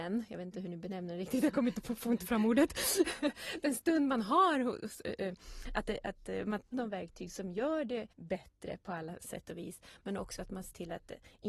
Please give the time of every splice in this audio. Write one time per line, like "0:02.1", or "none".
0:06.7
0:08.1